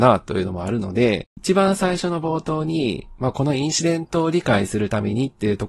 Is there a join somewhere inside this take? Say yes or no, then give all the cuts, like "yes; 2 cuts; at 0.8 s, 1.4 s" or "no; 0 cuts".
yes; 1 cut; at 1.3 s